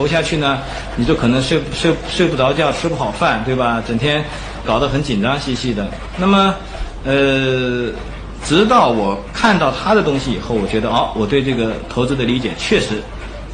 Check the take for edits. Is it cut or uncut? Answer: cut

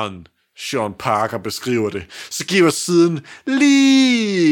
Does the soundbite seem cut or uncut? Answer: uncut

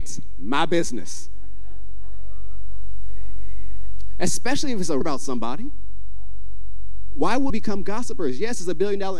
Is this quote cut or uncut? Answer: cut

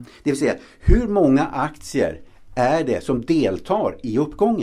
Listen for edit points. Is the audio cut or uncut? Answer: uncut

